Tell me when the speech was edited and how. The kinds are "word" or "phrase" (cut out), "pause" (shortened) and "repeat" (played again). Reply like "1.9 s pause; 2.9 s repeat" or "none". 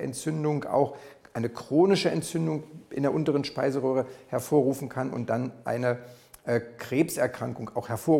none